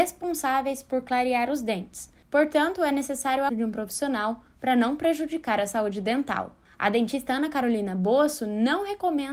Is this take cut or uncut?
cut